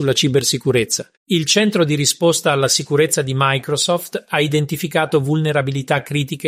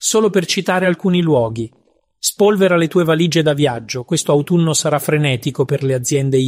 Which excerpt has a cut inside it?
first; 1 cut; at 1.1 s

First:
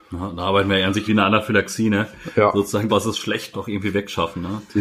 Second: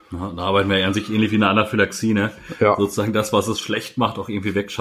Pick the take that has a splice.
first; 3 cuts; at 1.1 s, 2.9 s, 3.5 s

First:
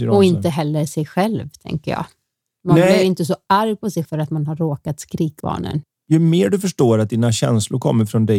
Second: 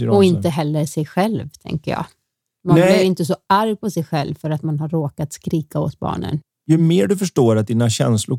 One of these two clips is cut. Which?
first; 2 cuts; at 4.0 s, 5.4 s

